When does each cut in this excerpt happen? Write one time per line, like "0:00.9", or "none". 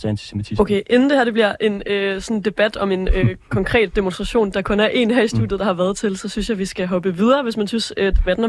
none